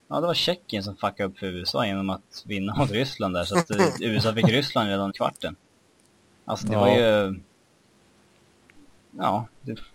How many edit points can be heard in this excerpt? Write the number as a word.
one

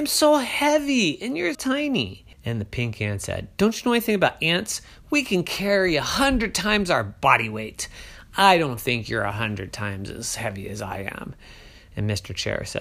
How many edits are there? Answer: two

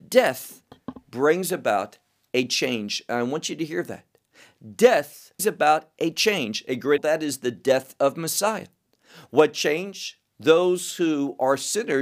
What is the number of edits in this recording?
two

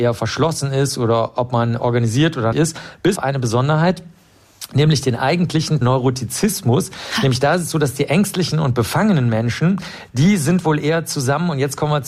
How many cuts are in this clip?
three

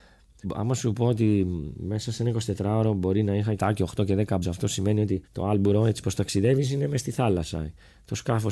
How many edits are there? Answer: three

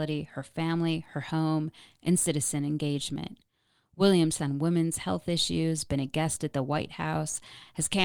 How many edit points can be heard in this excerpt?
one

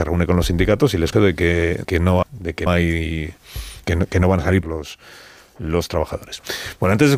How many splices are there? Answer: six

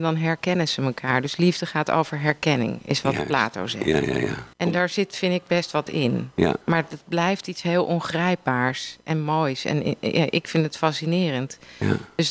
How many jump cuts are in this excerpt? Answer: two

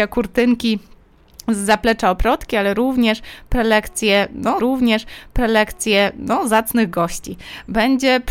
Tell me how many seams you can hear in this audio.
one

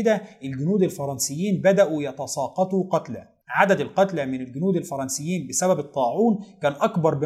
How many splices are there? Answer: one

